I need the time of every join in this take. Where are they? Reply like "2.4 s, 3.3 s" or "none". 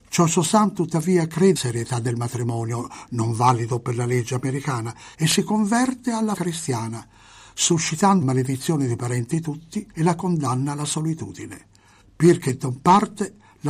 1.6 s, 5.1 s, 6.4 s, 8.2 s, 9.9 s, 12.0 s